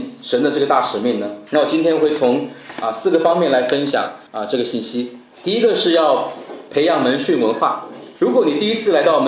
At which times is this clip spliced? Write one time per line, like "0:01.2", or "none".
0:04.3